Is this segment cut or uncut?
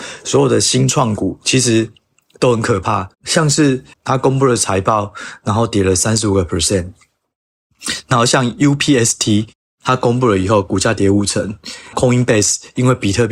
cut